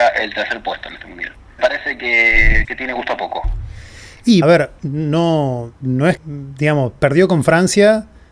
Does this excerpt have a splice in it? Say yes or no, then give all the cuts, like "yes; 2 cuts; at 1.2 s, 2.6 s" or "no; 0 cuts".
yes; 5 cuts; at 1.6 s, 2.6 s, 4.4 s, 4.8 s, 6.2 s